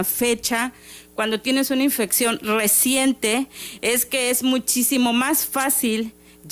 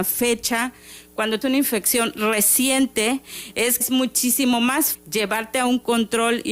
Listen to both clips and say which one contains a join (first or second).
second